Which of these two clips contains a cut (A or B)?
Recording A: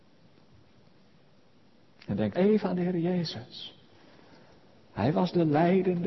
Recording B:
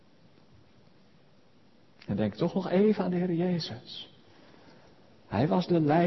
A